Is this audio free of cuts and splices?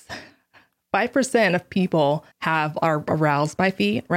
no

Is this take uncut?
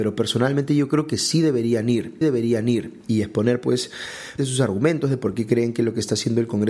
no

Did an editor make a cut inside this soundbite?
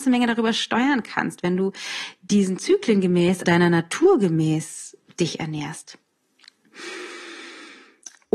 yes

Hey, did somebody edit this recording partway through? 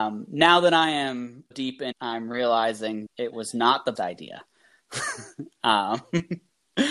yes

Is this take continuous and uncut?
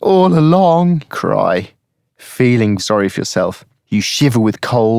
no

